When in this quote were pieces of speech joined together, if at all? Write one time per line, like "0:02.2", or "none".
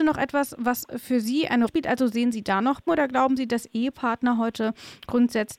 0:01.7
0:02.9